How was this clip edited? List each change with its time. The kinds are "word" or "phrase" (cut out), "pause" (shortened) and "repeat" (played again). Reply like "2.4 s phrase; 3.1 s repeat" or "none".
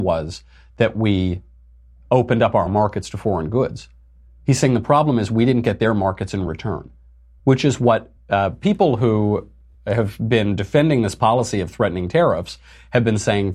none